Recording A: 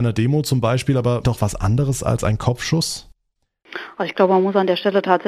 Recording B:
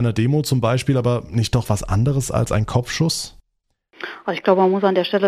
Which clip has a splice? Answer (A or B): A